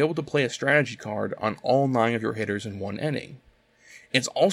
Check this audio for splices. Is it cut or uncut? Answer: uncut